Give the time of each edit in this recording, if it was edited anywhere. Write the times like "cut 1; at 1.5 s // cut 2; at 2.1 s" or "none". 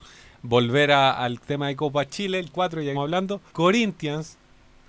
cut 1; at 2.5 s // cut 2; at 2.9 s // cut 3; at 3.5 s